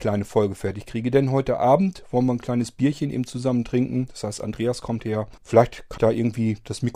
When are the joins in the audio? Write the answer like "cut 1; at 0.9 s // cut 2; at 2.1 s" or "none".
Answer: cut 1; at 5.4 s // cut 2; at 6.0 s